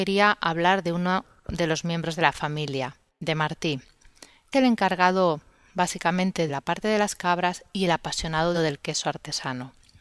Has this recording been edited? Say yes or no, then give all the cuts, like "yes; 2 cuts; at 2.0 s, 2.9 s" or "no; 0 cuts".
yes; 3 cuts; at 4.5 s, 6.5 s, 8.5 s